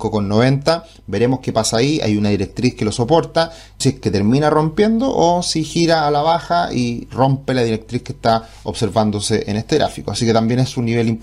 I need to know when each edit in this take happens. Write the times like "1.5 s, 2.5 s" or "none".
3.8 s